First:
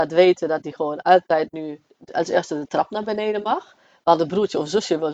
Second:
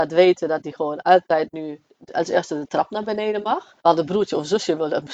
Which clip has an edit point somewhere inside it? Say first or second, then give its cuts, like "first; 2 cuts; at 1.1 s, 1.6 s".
second; 1 cut; at 3.8 s